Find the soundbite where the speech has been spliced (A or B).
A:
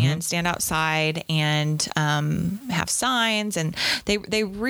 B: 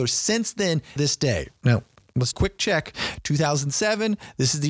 B